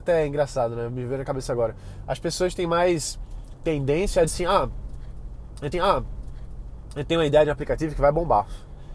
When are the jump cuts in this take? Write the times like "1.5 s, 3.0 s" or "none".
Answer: 4.3 s, 5.7 s